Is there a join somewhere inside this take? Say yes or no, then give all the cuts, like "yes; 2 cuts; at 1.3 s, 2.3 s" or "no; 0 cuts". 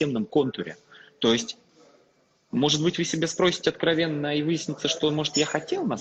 no; 0 cuts